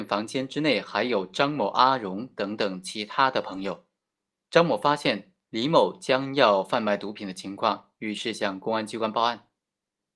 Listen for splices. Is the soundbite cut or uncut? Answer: uncut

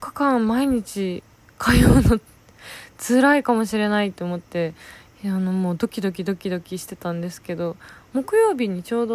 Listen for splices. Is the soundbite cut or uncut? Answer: uncut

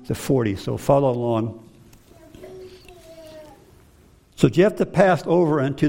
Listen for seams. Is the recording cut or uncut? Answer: uncut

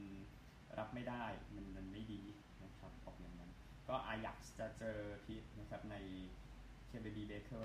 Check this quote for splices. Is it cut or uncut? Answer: cut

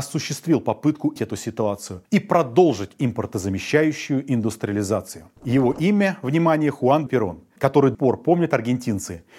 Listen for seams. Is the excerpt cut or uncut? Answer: cut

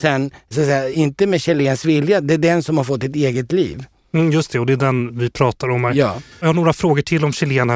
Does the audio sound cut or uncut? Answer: uncut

